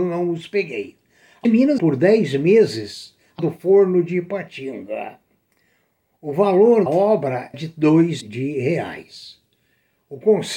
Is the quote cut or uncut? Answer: cut